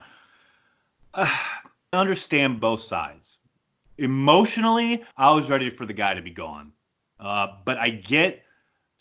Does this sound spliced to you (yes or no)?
yes